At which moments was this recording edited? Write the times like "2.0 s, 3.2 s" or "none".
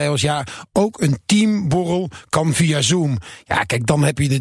none